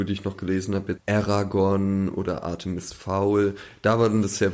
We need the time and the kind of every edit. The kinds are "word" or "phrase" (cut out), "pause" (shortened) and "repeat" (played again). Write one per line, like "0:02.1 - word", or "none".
0:01.0 - word